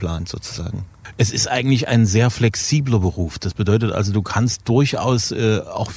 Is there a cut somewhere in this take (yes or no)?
no